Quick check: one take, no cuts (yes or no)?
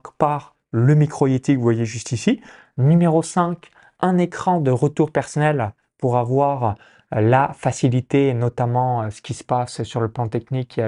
yes